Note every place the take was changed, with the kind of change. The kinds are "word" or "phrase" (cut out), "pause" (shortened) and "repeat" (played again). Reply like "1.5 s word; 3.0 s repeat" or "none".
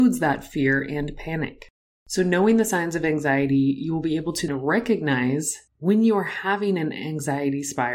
1.9 s pause; 4.5 s word; 5.7 s pause